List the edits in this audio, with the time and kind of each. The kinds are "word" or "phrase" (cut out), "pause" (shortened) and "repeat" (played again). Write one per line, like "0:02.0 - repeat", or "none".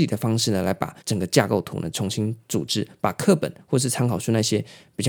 0:01.0 - pause